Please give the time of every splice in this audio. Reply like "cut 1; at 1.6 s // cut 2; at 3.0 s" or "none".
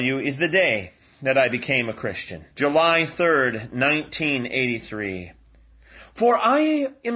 cut 1; at 2.5 s

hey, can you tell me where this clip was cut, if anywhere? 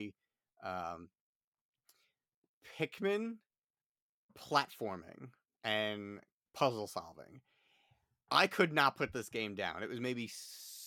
cut 1; at 4.3 s

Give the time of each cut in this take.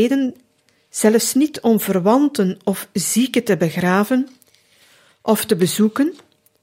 none

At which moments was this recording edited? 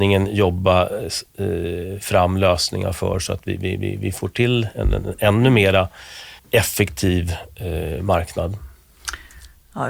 cut 1; at 6.4 s

